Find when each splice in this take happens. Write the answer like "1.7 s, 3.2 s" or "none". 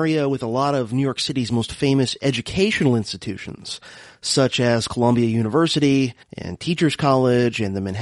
6.2 s